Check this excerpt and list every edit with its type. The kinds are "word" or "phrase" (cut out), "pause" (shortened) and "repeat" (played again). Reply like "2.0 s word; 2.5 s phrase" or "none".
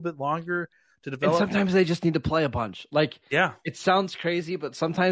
none

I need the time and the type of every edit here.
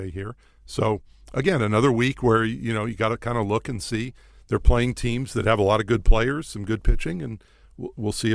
none

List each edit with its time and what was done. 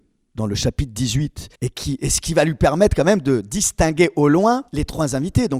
1.5 s pause; 4.7 s pause

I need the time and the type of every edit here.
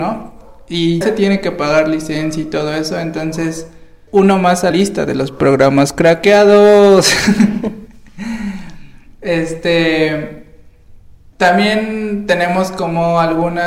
1.0 s word; 4.1 s word; 4.7 s word; 11.3 s word

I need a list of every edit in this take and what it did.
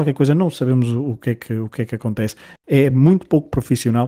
none

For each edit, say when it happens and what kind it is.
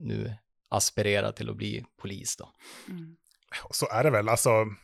none

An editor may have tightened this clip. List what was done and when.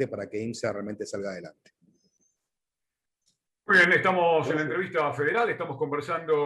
none

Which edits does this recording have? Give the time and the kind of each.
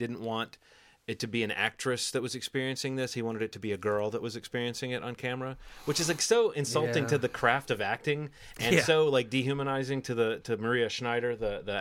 none

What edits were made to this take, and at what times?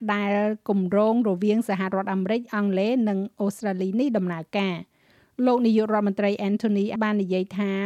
7.0 s word

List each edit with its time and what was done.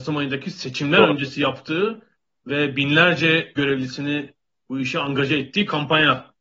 3.6 s word

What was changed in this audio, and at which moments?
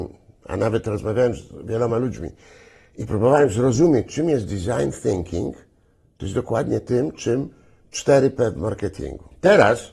none

